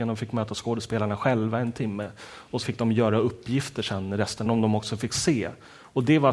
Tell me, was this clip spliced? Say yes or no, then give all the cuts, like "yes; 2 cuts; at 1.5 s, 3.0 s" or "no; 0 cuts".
yes; 2 cuts; at 2.6 s, 4.5 s